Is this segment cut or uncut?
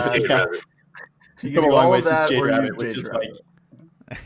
uncut